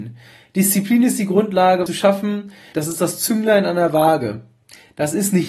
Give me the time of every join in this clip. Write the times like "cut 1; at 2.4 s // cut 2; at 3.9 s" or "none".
cut 1; at 1.9 s // cut 2; at 2.7 s

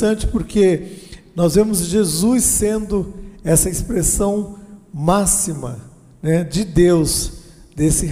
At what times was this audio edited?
none

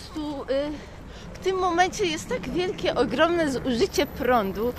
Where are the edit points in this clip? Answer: none

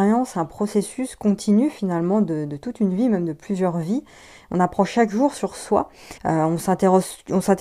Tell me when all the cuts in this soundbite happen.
cut 1; at 6.2 s

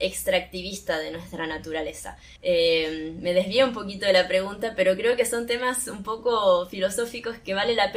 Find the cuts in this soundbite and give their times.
cut 1; at 2.4 s

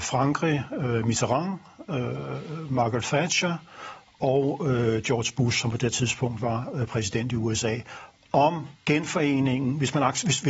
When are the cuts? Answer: cut 1; at 8.8 s

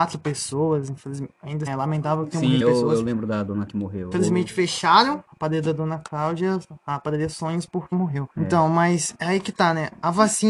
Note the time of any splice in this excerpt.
cut 1; at 1.7 s // cut 2; at 2.6 s // cut 3; at 3.7 s // cut 4; at 4.1 s // cut 5; at 5.2 s // cut 6; at 7.9 s // cut 7; at 8.3 s

